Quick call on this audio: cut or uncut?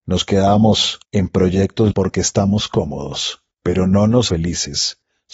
cut